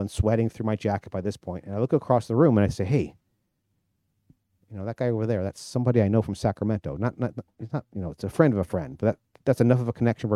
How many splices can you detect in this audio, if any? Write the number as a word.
zero